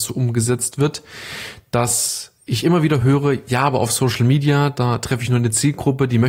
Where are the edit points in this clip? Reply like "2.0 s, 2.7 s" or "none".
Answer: none